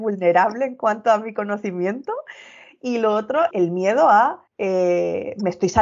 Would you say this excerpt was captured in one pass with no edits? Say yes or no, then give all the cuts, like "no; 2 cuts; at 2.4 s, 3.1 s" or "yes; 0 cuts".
no; 2 cuts; at 3.5 s, 4.5 s